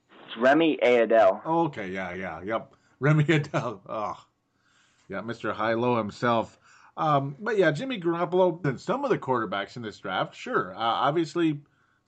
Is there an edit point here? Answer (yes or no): yes